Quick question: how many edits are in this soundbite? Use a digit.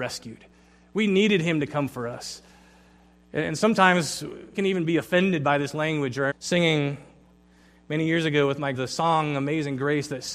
3